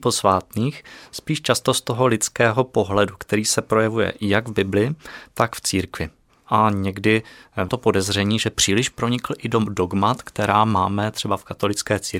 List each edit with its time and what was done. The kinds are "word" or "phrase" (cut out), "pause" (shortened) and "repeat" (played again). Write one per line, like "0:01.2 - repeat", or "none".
0:07.7 - word